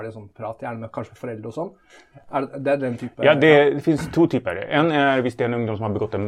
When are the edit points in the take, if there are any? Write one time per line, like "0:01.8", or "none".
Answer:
none